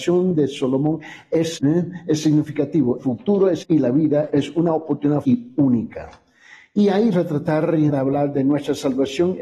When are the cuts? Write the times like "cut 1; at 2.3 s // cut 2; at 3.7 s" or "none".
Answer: cut 1; at 1.5 s // cut 2; at 3.0 s // cut 3; at 3.6 s // cut 4; at 4.3 s // cut 5; at 5.2 s // cut 6; at 7.1 s // cut 7; at 7.9 s